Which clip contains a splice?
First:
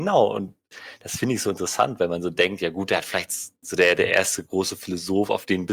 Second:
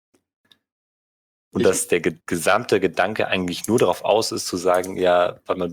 second; 1 cut; at 2.2 s

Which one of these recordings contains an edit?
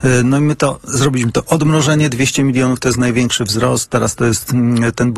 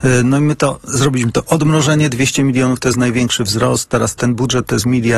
second; 1 cut; at 4.2 s

